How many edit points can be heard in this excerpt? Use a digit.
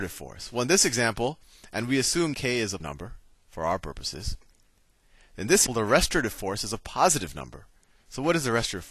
4